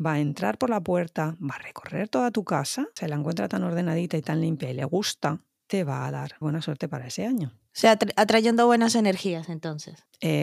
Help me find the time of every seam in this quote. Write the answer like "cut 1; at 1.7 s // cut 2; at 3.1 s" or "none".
cut 1; at 6.4 s